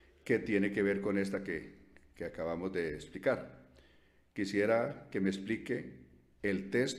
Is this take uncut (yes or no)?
yes